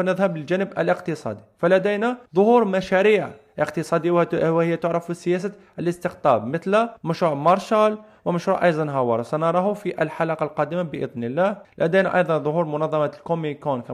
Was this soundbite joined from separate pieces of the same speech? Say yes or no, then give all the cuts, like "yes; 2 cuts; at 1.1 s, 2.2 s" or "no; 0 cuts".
yes; 3 cuts; at 2.3 s, 7.0 s, 11.6 s